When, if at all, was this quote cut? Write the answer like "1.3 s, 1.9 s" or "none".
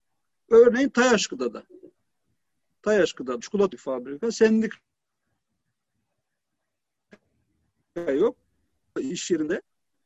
3.4 s, 3.7 s